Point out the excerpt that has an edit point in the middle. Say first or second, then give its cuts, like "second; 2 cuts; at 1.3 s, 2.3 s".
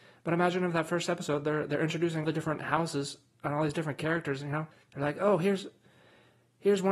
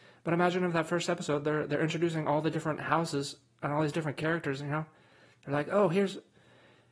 first; 2 cuts; at 2.2 s, 4.7 s